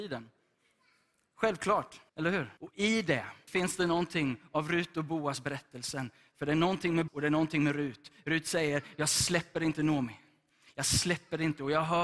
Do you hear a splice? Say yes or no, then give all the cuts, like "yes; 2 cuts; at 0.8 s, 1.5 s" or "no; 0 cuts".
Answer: yes; 4 cuts; at 2.1 s, 2.6 s, 3.5 s, 7.1 s